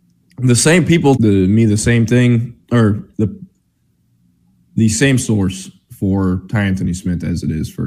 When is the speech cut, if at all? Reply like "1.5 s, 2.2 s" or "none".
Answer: 1.2 s, 3.1 s, 4.9 s